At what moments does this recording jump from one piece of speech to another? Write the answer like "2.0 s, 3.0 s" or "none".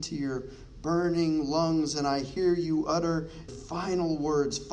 3.5 s